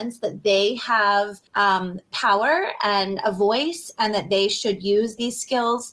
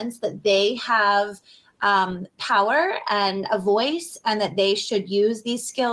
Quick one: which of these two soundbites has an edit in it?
first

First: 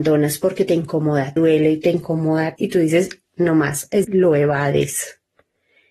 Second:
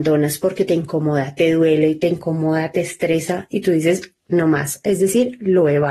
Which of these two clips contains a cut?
first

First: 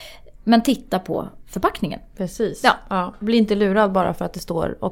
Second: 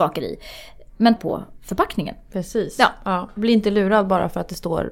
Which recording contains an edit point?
second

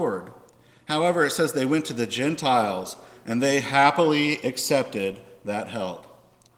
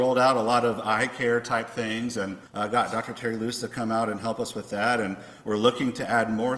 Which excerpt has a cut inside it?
second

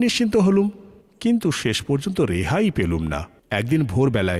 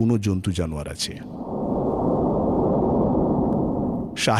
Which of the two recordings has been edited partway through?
first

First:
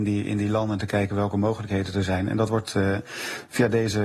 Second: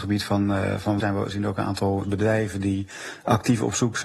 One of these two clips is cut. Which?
second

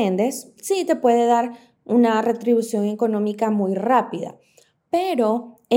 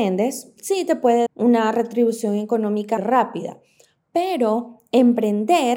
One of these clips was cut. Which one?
second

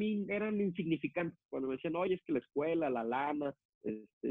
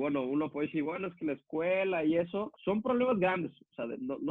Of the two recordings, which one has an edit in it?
second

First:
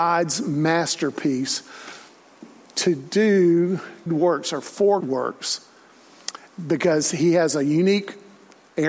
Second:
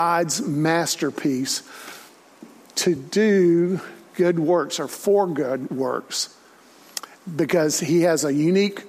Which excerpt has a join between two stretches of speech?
first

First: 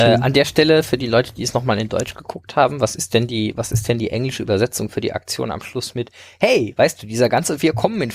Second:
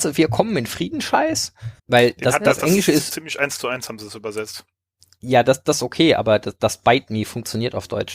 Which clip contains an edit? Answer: second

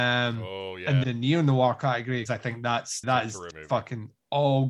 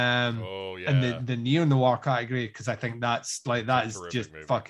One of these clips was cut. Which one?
first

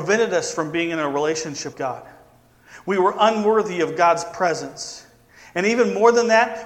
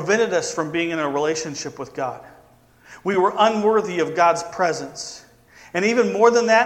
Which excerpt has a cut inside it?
first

